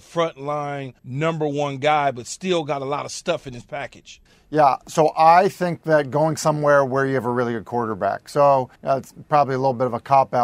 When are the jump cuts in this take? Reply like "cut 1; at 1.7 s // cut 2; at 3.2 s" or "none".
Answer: cut 1; at 1.0 s // cut 2; at 4.3 s // cut 3; at 8.7 s